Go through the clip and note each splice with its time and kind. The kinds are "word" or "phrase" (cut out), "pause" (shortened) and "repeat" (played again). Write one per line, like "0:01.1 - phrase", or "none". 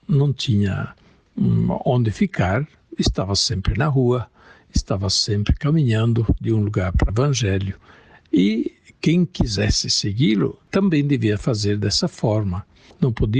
0:07.1 - phrase
0:10.6 - pause